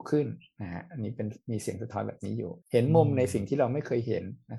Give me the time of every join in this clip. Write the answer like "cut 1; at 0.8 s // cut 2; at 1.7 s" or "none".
cut 1; at 2.6 s